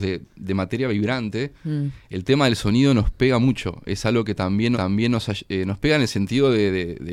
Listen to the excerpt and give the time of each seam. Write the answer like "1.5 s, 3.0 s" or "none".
4.7 s